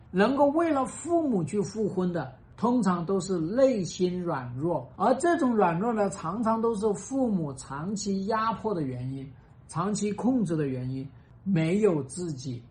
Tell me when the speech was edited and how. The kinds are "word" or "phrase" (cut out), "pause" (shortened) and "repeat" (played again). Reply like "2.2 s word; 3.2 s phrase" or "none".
none